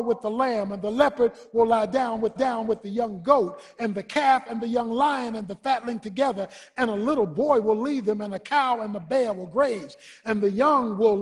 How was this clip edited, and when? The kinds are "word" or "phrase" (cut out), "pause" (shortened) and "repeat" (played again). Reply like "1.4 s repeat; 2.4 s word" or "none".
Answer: 2.4 s repeat